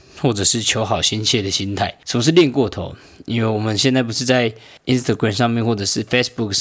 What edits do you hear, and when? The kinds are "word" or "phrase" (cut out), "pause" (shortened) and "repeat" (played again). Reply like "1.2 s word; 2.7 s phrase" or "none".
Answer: 2.0 s pause; 4.8 s pause

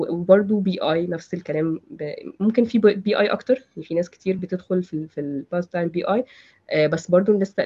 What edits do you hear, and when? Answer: none

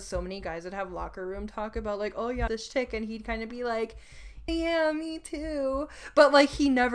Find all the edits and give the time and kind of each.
2.5 s phrase; 4.5 s word

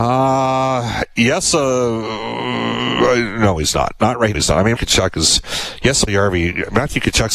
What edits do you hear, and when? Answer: 4.3 s word; 4.7 s word; 6.1 s word

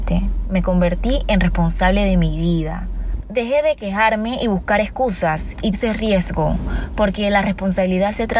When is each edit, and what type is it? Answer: 5.7 s word

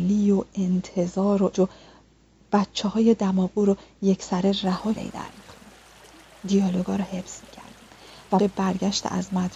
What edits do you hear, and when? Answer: 1.5 s word; 5.0 s phrase; 8.4 s word

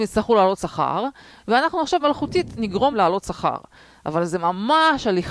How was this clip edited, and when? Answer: 2.0 s word; 2.9 s word

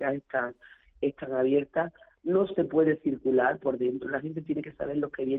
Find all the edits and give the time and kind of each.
none

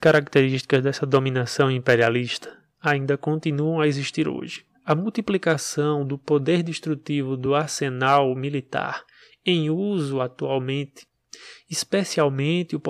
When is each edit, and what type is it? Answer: none

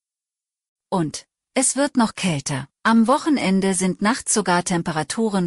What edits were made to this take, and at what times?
2.7 s pause

